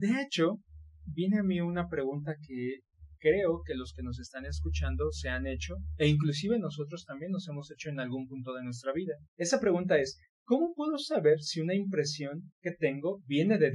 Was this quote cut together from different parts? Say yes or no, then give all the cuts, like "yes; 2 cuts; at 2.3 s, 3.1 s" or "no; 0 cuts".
yes; 1 cut; at 9.2 s